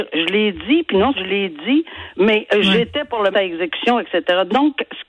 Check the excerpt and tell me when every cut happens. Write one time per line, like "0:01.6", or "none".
0:01.1
0:03.3